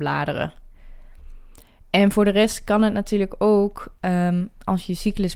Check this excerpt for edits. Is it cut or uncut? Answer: uncut